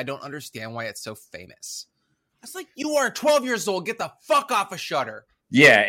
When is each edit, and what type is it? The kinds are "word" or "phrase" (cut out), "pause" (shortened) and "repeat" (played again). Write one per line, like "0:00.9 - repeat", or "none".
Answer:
none